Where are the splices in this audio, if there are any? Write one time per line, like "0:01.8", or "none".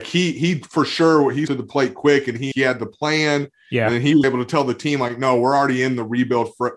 0:01.5
0:02.5
0:04.2